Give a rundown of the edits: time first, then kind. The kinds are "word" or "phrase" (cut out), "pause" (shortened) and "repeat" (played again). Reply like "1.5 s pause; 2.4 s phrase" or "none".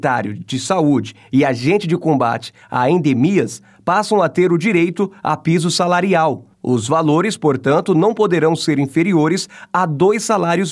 6.5 s pause